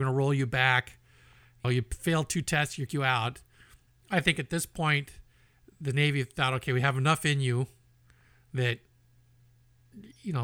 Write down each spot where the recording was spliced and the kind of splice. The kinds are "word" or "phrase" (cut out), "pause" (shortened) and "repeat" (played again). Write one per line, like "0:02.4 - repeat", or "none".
0:01.6 - word
0:02.9 - word